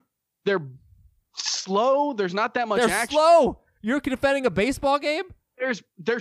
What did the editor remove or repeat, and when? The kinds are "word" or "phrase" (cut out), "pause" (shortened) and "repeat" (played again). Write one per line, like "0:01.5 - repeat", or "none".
none